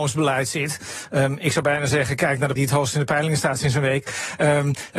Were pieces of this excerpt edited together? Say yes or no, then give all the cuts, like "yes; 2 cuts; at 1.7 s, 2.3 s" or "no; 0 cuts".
yes; 1 cut; at 2.6 s